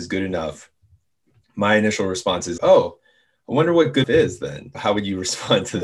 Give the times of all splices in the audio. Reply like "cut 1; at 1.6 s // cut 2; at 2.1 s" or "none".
cut 1; at 2.6 s // cut 2; at 4.0 s // cut 3; at 4.7 s

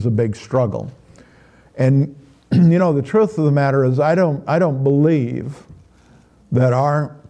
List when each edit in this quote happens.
none

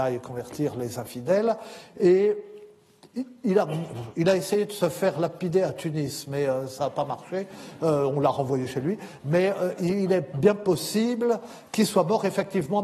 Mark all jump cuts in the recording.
none

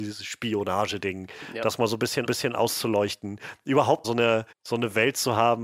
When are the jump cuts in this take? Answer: cut 1; at 2.3 s // cut 2; at 4.0 s // cut 3; at 4.5 s

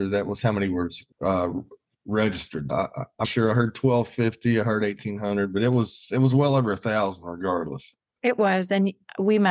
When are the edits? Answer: cut 1; at 1.1 s // cut 2; at 2.7 s // cut 3; at 3.2 s

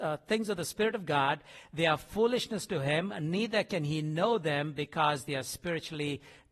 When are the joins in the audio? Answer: none

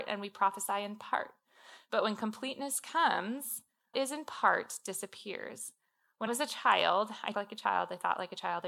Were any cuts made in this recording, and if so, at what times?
cut 1; at 3.9 s // cut 2; at 6.3 s // cut 3; at 7.3 s

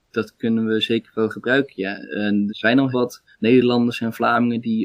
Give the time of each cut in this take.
cut 1; at 2.5 s // cut 2; at 2.9 s // cut 3; at 3.3 s

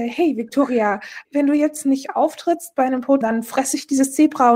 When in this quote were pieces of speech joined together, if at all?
cut 1; at 3.2 s

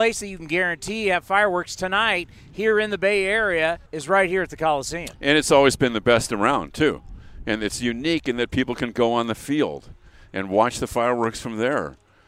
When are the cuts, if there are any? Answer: cut 1; at 3.9 s

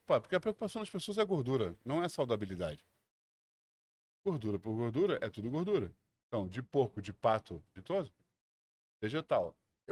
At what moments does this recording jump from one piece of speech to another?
none

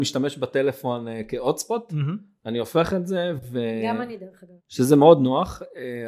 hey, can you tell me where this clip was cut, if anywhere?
cut 1; at 4.6 s

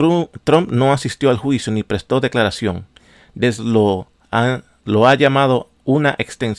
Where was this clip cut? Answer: cut 1; at 3.6 s

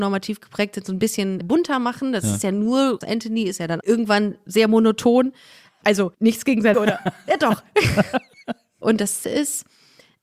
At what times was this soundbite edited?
cut 1; at 1.4 s // cut 2; at 3.0 s // cut 3; at 3.8 s // cut 4; at 6.1 s // cut 5; at 6.7 s // cut 6; at 9.2 s

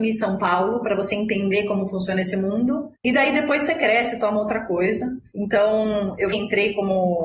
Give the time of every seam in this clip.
cut 1; at 6.3 s

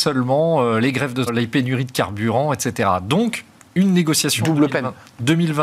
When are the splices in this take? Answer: cut 1; at 1.3 s

